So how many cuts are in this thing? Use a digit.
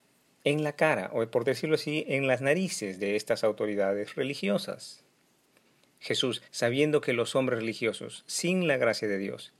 1